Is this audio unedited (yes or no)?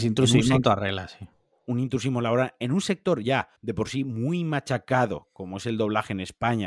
no